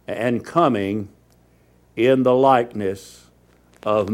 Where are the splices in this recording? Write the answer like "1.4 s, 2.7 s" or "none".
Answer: none